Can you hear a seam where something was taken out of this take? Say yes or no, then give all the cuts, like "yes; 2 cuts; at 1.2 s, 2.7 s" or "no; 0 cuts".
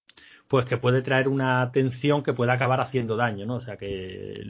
no; 0 cuts